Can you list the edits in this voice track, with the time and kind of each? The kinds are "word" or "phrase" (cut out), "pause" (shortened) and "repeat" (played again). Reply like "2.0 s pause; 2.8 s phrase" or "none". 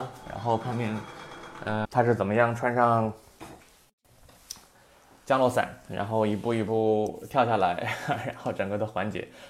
1.8 s word